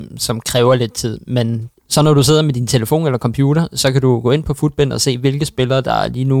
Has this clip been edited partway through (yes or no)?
yes